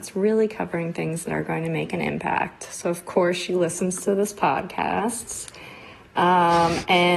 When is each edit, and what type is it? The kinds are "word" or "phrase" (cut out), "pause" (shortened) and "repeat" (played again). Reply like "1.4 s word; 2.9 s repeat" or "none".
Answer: none